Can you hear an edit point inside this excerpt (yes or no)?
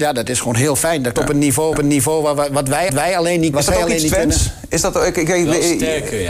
yes